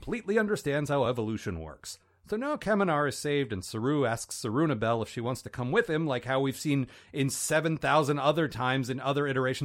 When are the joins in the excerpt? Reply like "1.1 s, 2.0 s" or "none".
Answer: none